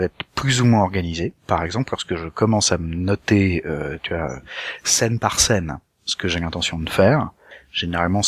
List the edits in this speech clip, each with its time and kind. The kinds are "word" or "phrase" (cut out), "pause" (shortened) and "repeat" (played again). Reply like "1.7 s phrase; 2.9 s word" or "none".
1.4 s pause